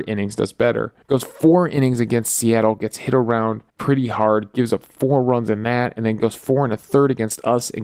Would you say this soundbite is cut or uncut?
cut